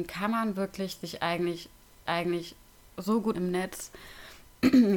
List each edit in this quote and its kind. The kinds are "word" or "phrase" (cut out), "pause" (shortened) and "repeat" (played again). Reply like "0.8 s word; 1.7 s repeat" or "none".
2.1 s repeat; 3.3 s word